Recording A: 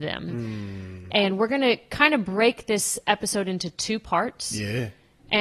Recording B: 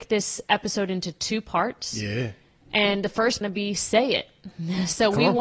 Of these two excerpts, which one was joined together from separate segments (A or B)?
B